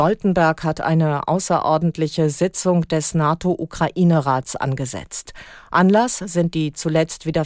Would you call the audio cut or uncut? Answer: uncut